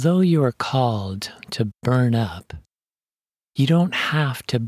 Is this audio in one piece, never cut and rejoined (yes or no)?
yes